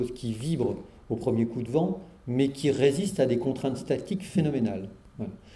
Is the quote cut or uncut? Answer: uncut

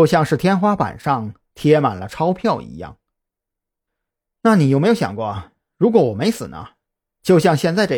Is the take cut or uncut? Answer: uncut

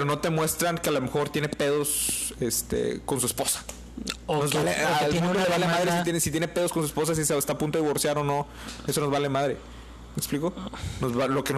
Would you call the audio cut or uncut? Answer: uncut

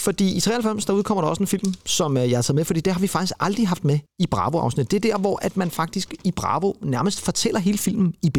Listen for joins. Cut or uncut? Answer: uncut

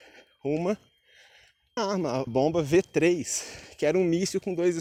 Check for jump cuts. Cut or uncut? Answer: cut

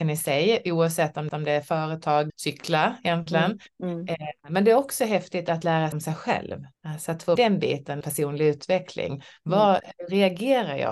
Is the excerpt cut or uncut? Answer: cut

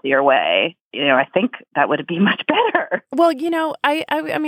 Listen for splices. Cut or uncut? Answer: uncut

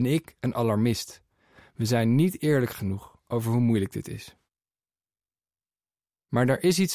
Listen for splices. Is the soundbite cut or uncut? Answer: uncut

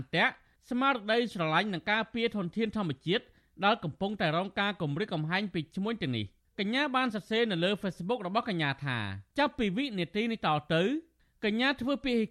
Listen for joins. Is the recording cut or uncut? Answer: uncut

